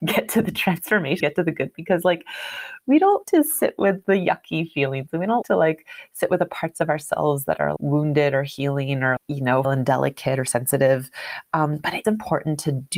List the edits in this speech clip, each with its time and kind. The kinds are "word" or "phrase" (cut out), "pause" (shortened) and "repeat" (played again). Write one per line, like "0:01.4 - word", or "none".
0:01.2 - word
0:01.7 - word
0:03.2 - word
0:05.4 - word
0:07.8 - word
0:09.2 - word
0:09.6 - word
0:12.0 - word